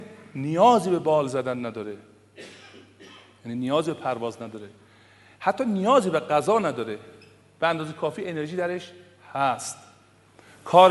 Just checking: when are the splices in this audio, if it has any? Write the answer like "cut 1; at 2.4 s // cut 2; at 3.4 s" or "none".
none